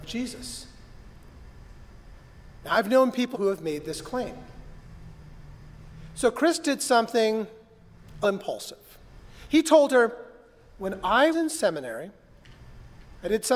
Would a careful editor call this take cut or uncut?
cut